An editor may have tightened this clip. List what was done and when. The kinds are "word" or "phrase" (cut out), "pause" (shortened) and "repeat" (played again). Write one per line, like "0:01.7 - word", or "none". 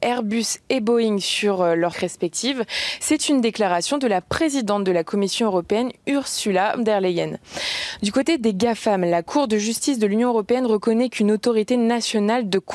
0:01.9 - phrase
0:06.8 - word